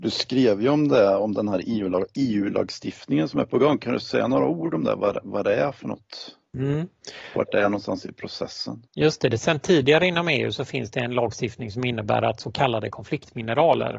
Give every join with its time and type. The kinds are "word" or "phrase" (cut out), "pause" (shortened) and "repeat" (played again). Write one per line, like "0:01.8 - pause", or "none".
0:08.9 - pause